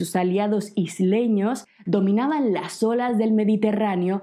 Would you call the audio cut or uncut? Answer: uncut